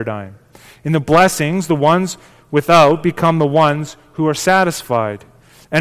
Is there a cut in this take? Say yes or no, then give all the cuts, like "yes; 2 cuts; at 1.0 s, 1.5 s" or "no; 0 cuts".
no; 0 cuts